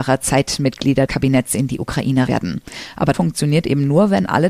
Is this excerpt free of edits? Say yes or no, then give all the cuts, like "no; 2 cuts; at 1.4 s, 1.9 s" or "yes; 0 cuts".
no; 3 cuts; at 1.1 s, 2.3 s, 3.1 s